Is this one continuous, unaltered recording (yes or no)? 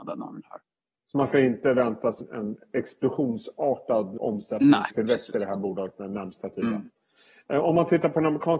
no